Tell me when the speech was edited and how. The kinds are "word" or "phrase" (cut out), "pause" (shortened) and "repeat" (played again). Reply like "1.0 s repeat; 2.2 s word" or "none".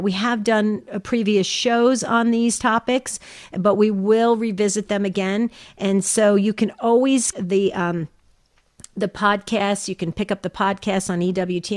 7.3 s word